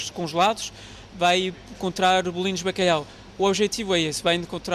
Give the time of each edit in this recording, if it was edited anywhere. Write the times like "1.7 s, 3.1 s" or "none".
none